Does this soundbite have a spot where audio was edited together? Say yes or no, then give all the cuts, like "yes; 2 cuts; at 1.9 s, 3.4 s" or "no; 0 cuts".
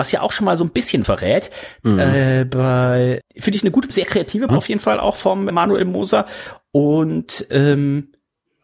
yes; 5 cuts; at 1.0 s, 3.2 s, 3.9 s, 4.5 s, 5.5 s